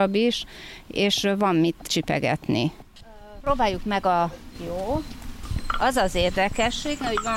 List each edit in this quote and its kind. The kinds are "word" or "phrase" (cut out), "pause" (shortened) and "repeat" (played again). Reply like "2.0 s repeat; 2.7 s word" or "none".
4.6 s word